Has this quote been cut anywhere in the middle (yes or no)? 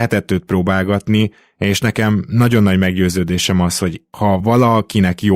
no